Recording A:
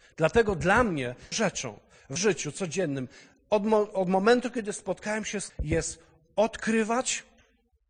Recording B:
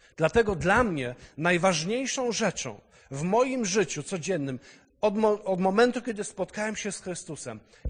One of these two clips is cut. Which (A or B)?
A